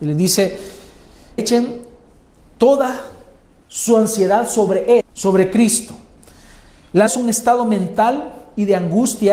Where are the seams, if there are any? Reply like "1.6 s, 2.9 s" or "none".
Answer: 1.4 s, 5.0 s, 7.1 s